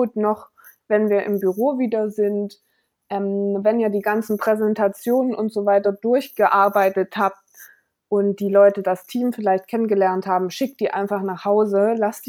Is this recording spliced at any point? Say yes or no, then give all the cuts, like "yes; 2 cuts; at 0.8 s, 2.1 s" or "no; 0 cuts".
no; 0 cuts